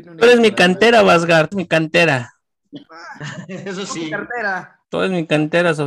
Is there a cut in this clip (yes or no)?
yes